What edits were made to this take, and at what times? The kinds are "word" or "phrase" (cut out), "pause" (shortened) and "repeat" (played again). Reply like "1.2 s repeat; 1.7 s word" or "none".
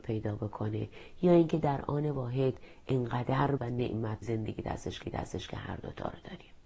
3.6 s word; 4.2 s word; 5.0 s repeat